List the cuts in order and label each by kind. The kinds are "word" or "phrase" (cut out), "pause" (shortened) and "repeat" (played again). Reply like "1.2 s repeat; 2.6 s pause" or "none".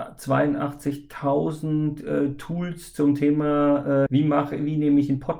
4.1 s word